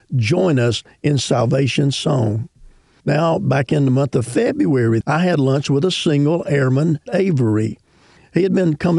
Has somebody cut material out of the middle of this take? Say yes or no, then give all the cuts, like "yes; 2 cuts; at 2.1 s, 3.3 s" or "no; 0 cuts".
yes; 2 cuts; at 5.0 s, 7.1 s